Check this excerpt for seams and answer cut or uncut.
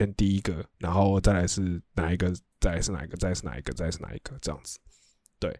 cut